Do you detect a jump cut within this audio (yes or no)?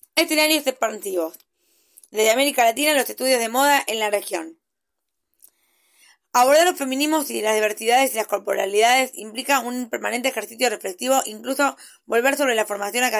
no